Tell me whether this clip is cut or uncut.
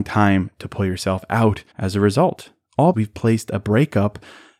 cut